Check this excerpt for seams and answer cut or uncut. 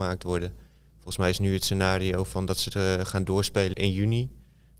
cut